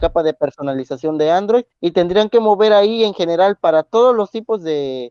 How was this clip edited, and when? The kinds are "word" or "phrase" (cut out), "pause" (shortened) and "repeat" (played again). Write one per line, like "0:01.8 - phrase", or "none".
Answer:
0:01.7 - pause